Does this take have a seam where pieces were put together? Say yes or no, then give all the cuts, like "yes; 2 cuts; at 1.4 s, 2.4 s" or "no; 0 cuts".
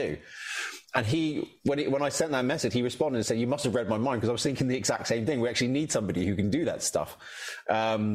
no; 0 cuts